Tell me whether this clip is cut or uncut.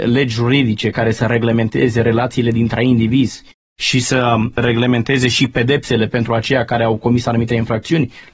uncut